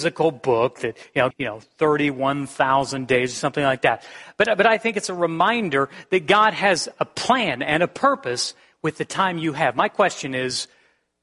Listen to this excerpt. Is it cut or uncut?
cut